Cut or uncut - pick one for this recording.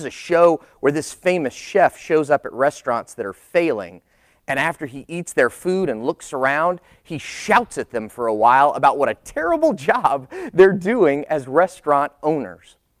uncut